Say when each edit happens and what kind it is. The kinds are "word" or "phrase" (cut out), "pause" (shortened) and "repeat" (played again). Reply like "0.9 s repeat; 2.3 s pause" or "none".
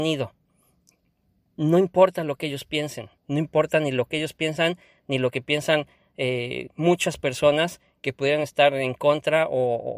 3.2 s pause